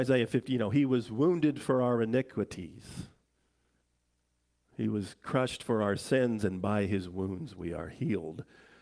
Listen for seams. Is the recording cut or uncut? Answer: uncut